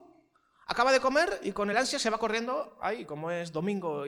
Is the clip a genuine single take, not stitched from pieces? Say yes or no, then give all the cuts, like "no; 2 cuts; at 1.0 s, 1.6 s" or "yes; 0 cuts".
yes; 0 cuts